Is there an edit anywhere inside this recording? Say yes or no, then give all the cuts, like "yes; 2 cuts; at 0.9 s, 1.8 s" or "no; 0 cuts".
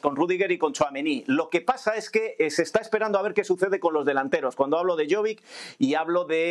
no; 0 cuts